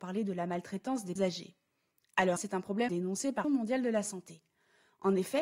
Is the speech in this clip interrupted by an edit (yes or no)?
yes